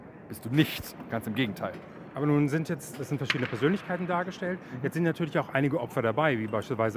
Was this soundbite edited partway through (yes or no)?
yes